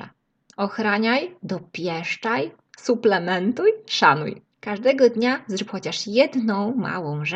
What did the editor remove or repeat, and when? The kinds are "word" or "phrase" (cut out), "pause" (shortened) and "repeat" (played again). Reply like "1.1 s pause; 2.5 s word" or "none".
4.5 s pause